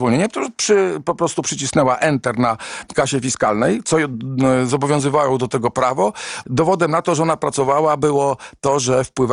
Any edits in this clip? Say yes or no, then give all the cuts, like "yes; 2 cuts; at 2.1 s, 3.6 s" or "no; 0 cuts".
yes; 1 cut; at 6.4 s